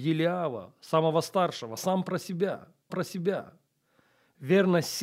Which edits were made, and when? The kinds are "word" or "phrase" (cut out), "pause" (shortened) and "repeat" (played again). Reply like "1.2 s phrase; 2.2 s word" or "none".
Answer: 1.8 s word; 2.9 s repeat